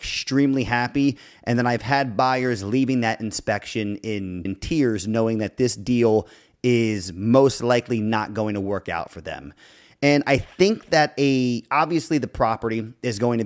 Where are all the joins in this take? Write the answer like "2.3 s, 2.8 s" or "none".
4.5 s